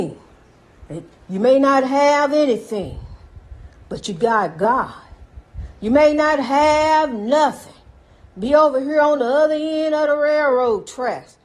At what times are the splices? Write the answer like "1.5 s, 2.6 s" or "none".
none